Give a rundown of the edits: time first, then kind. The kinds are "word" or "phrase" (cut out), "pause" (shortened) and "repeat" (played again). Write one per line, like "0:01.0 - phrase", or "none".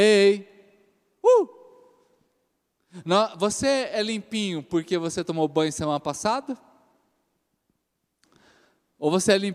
none